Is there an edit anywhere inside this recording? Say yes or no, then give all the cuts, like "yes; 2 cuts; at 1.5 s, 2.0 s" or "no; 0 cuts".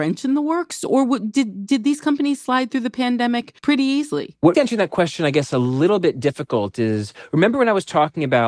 yes; 2 cuts; at 3.6 s, 4.5 s